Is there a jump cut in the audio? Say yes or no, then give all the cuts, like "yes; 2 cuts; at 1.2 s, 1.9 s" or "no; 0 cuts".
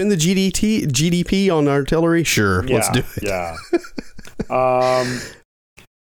no; 0 cuts